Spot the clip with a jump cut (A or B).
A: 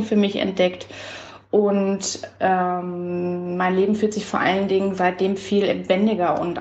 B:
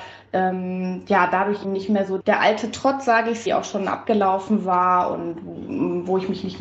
B